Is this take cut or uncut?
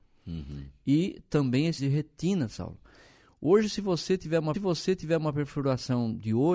cut